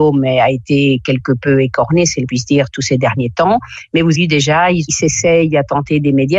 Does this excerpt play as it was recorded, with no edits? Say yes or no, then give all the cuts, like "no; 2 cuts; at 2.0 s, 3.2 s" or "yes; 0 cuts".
no; 2 cuts; at 2.3 s, 4.1 s